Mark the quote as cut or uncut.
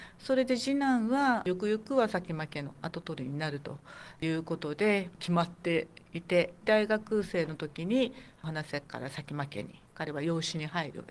cut